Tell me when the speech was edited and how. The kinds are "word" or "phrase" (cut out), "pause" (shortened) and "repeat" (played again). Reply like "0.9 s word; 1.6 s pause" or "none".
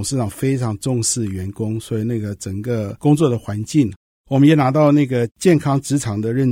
none